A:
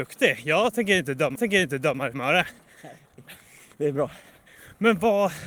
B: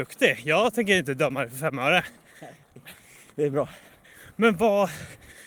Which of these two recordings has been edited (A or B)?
A